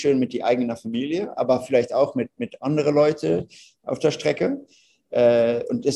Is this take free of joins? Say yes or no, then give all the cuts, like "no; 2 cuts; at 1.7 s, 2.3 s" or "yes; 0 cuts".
yes; 0 cuts